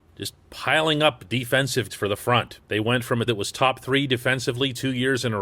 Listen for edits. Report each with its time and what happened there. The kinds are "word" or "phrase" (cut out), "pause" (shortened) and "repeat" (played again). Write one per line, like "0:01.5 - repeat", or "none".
0:01.9 - word
0:02.6 - pause
0:03.3 - word